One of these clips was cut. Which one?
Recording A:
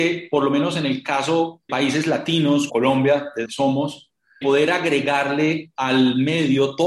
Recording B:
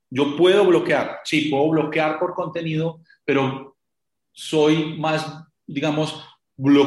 A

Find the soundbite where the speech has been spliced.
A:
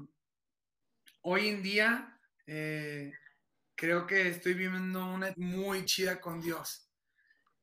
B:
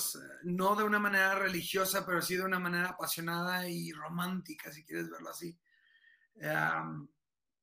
A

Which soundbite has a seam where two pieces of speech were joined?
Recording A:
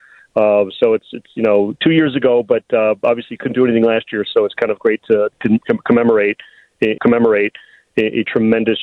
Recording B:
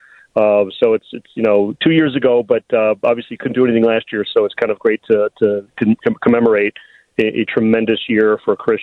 A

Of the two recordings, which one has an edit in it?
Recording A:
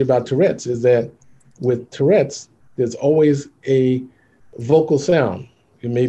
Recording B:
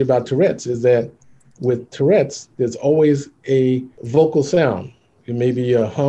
B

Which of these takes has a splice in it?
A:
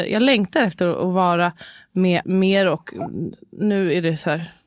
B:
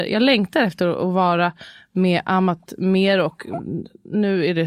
A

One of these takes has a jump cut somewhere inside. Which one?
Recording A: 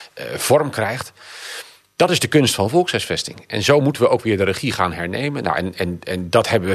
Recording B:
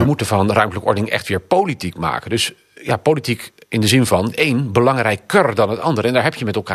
B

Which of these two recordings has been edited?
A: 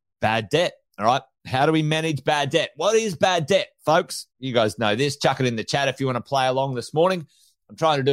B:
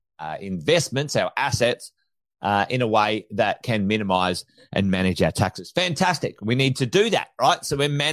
A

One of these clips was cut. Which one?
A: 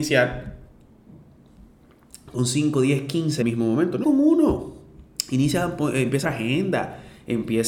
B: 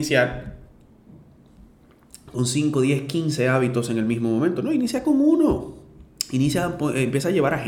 A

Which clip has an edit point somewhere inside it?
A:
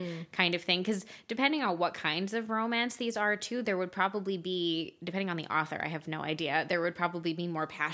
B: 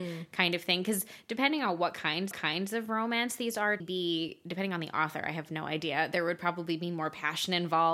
B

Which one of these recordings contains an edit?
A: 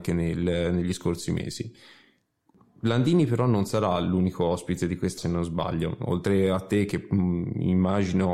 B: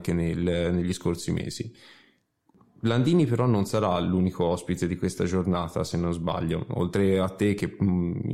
A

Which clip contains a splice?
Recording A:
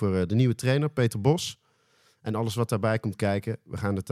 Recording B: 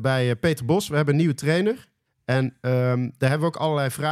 B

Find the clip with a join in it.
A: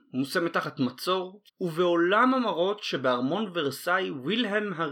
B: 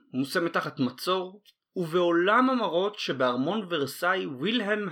A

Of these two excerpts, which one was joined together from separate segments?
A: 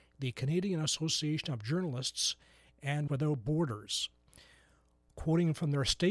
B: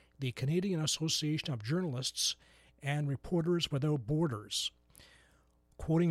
A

